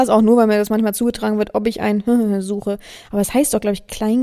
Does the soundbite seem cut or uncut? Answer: uncut